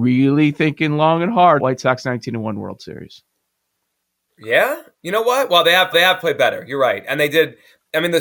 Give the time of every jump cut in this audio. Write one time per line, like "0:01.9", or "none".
0:01.6
0:05.9